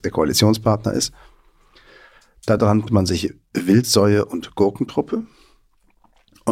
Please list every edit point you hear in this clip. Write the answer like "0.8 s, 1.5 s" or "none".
none